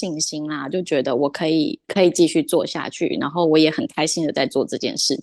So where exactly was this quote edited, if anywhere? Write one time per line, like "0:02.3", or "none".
0:01.8